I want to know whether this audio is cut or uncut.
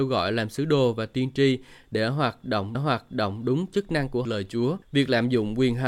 cut